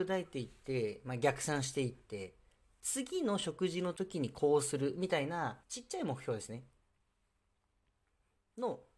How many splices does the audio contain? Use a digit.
1